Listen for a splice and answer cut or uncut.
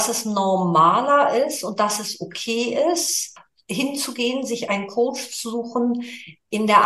uncut